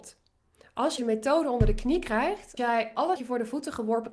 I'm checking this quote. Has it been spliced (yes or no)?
yes